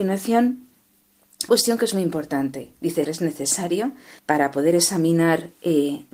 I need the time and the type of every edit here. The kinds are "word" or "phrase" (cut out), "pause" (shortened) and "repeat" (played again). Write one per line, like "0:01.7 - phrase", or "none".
0:01.5 - word
0:03.0 - word
0:04.2 - pause